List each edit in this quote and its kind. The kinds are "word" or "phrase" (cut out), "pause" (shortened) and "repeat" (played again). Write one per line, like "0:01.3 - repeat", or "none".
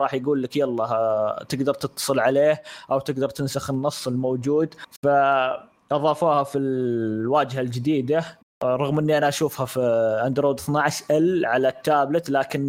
none